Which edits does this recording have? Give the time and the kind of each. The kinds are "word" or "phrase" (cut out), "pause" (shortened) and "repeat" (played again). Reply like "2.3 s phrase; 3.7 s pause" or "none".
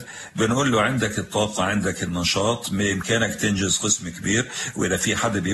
none